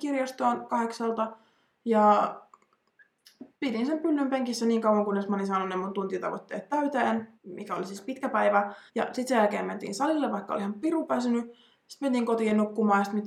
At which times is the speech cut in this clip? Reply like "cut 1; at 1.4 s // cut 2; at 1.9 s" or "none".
cut 1; at 3.5 s // cut 2; at 7.3 s // cut 3; at 8.9 s